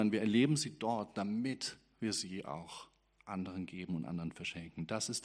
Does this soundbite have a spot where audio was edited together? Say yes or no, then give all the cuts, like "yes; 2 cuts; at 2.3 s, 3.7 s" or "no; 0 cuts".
no; 0 cuts